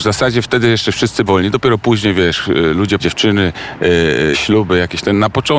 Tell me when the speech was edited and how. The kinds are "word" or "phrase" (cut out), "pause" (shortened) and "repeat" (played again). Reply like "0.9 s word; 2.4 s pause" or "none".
1.3 s word; 3.0 s word; 4.3 s word